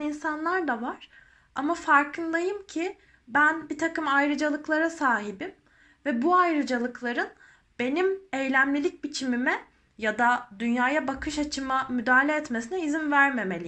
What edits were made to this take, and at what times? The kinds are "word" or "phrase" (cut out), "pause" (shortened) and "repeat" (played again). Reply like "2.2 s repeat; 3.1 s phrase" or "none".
none